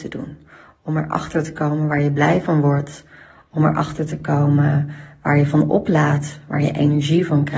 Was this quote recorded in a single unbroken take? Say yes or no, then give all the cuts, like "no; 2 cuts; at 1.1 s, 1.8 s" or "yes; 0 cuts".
yes; 0 cuts